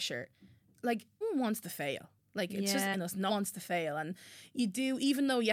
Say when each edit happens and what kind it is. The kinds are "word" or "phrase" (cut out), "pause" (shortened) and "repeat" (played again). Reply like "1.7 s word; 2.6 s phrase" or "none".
1.2 s word; 2.9 s word; 3.3 s word

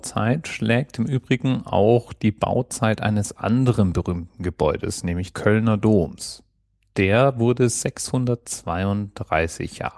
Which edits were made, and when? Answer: 5.3 s word

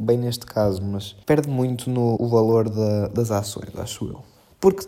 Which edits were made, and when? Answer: 1.2 s pause; 2.2 s word

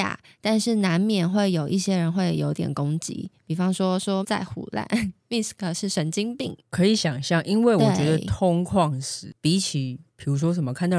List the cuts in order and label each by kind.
4.2 s word; 10.1 s pause

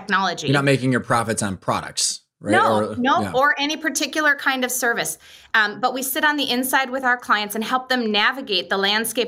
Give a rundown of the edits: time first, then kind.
none

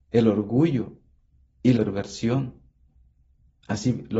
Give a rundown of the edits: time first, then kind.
1.8 s word

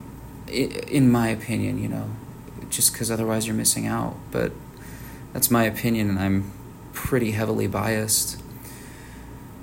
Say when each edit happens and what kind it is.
none

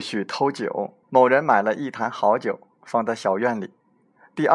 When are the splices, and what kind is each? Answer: 1.0 s pause

